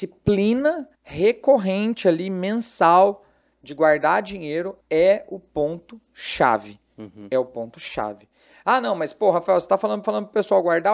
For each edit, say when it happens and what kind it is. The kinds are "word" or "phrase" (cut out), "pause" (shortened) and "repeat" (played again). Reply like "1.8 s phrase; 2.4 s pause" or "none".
0.9 s pause; 4.8 s pause; 10.0 s repeat

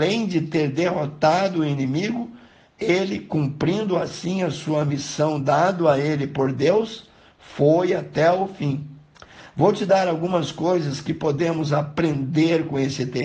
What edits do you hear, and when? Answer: none

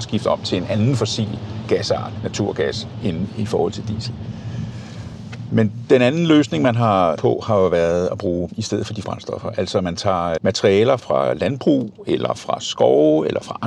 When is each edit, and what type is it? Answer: 2.2 s word; 7.2 s word; 8.5 s word; 9.0 s word; 10.4 s word; 11.0 s word

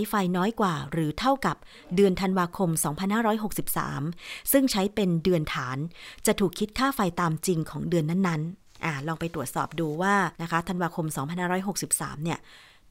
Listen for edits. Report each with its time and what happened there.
10.3 s pause

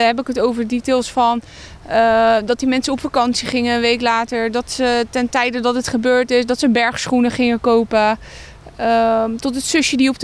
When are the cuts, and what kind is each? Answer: none

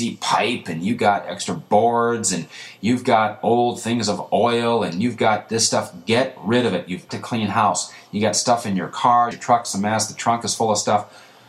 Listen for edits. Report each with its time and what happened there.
7.1 s word; 9.3 s phrase

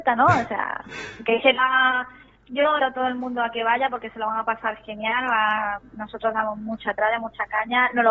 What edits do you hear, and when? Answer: 2.8 s word

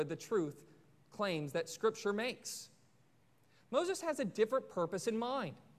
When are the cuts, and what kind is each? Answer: none

